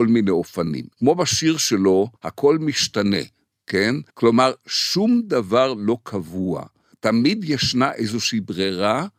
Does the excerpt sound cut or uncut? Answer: cut